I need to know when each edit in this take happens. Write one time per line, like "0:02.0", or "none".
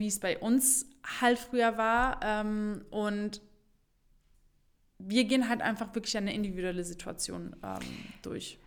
none